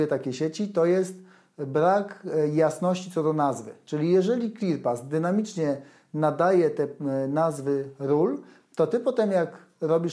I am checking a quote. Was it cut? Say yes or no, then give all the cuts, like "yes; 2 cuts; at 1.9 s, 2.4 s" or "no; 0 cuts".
no; 0 cuts